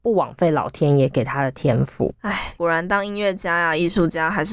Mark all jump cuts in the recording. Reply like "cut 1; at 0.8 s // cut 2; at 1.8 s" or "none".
cut 1; at 2.2 s